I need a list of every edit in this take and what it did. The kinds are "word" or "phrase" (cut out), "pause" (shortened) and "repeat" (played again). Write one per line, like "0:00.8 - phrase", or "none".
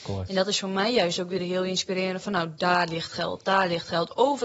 none